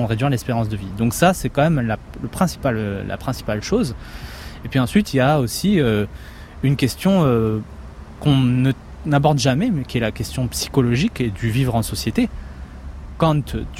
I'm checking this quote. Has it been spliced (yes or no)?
no